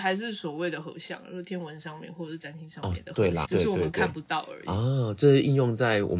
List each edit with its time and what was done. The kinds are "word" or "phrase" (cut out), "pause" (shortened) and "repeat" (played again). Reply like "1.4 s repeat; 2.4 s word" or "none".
3.4 s word